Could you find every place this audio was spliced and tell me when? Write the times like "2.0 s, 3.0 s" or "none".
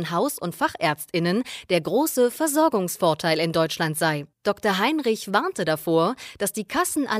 4.3 s